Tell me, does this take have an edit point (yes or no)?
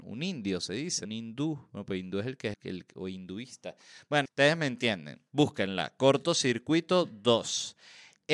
yes